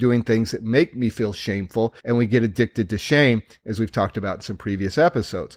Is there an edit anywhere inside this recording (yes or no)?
yes